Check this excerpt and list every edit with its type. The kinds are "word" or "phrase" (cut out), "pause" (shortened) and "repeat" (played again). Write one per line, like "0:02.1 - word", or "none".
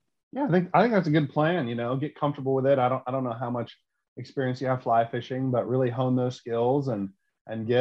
none